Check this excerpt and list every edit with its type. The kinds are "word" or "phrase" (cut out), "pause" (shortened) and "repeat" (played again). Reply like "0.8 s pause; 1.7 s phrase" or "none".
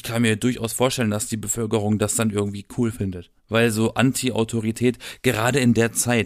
3.4 s pause